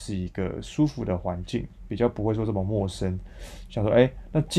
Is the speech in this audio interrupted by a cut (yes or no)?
no